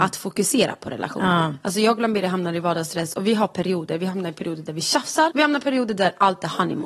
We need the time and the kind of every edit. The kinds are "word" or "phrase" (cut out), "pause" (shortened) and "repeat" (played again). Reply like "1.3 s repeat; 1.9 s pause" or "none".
5.3 s word